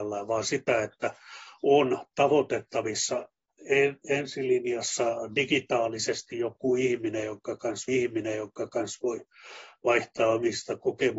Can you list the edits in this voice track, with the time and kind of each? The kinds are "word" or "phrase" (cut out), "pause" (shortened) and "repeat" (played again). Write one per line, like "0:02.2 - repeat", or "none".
0:07.9 - repeat